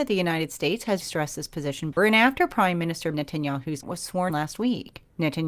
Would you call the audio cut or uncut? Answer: cut